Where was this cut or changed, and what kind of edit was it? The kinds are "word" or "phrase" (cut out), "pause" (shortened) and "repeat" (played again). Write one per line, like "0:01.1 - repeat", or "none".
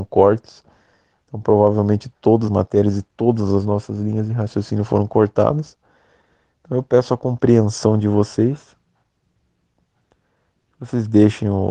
0:02.5 - word